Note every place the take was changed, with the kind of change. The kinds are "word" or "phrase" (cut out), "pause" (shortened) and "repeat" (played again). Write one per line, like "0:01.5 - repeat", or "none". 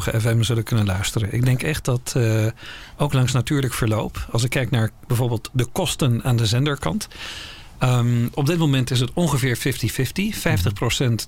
none